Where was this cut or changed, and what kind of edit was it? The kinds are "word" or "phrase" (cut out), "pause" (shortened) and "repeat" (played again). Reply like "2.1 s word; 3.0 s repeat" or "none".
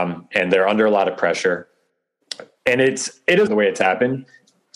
3.5 s word